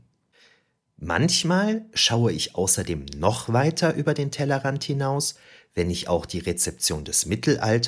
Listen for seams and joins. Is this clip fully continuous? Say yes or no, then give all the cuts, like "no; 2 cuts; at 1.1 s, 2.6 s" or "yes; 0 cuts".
yes; 0 cuts